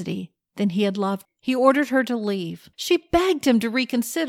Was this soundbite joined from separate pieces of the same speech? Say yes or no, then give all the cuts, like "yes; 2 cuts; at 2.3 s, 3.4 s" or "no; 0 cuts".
yes; 2 cuts; at 1.2 s, 2.7 s